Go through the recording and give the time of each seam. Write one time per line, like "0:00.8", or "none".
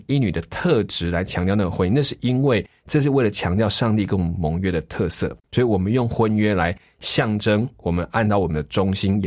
0:05.4